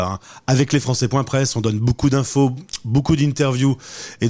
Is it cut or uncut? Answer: uncut